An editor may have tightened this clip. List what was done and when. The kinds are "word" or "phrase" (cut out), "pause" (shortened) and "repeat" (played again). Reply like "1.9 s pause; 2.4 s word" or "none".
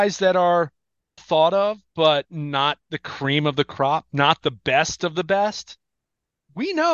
1.2 s word; 2.8 s pause